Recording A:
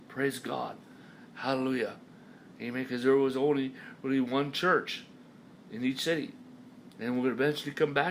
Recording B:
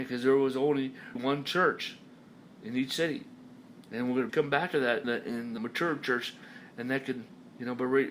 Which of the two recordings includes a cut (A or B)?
B